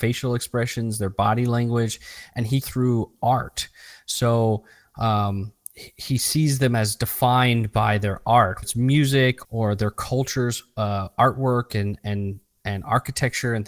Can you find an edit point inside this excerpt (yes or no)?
yes